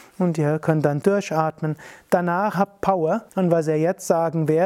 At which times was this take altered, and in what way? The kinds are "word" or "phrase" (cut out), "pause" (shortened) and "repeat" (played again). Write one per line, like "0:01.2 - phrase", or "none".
0:01.0 - phrase
0:02.5 - phrase
0:03.3 - pause